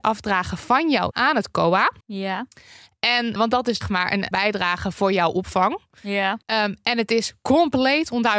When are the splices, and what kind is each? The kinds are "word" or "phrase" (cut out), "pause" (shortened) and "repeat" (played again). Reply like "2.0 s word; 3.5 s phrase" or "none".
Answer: 1.1 s word; 2.0 s pause; 3.4 s word; 3.8 s phrase; 4.3 s word; 6.4 s pause